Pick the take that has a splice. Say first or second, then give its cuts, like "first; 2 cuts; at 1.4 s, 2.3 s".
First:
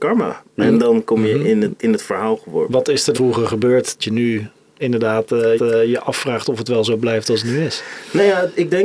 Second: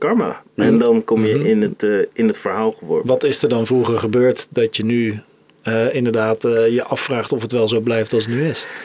first; 5 cuts; at 1.8 s, 3.1 s, 4.0 s, 4.8 s, 5.6 s